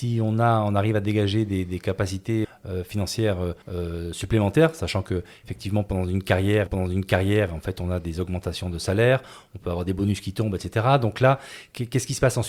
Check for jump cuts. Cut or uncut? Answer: cut